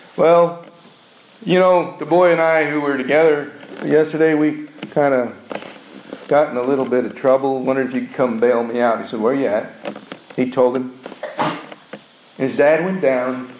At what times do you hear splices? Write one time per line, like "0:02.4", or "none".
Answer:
none